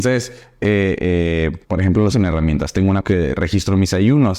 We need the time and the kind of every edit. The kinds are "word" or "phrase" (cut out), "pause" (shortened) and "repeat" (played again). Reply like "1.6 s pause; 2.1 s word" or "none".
1.0 s word; 1.6 s pause; 2.1 s word; 3.0 s word

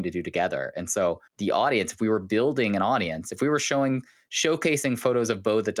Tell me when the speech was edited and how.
1.3 s pause

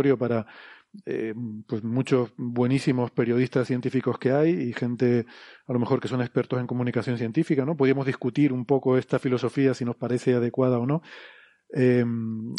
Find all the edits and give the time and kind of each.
none

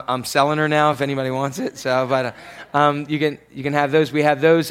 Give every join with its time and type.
none

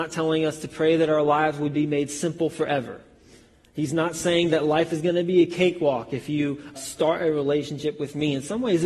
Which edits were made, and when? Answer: 6.7 s word

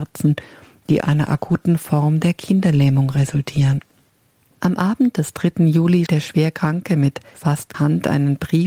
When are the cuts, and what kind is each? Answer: 1.0 s word; 6.1 s word; 7.7 s word

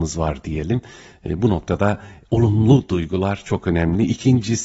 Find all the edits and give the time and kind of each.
none

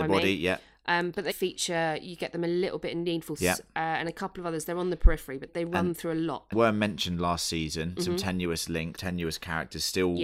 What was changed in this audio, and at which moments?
1.3 s word; 3.4 s word; 5.5 s word; 6.5 s word; 9.0 s word

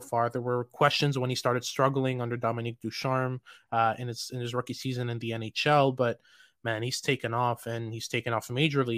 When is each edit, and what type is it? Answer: none

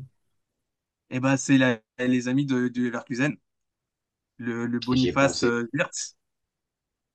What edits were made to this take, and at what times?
none

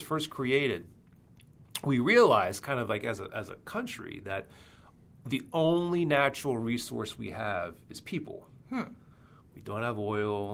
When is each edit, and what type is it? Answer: none

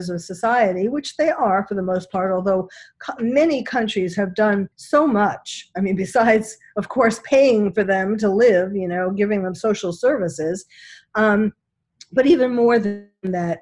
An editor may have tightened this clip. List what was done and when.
4.7 s pause

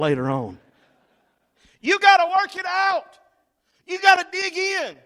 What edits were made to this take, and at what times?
none

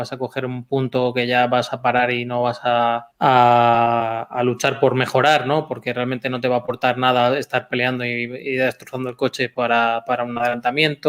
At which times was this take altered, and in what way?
3.1 s pause

